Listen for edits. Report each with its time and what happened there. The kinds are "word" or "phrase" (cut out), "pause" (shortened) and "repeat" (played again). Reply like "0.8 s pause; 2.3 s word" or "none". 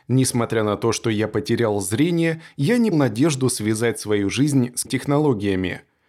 2.9 s word; 4.8 s word

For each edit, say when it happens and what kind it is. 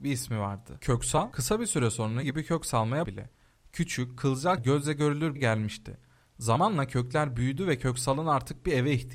2.2 s word; 3.0 s word; 4.6 s word; 5.4 s word

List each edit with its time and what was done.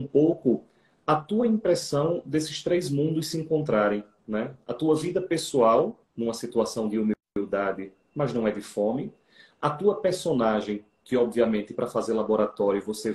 6.0 s pause

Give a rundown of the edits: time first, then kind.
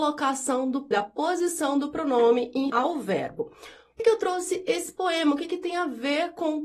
0.9 s word; 2.7 s word; 4.0 s word

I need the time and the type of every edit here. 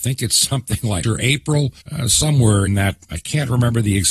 1.0 s word; 1.8 s pause; 2.7 s word

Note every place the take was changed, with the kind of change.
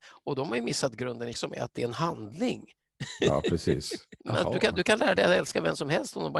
1.3 s word; 4.2 s pause

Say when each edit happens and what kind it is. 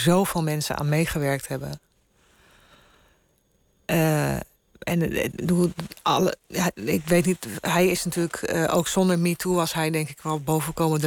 none

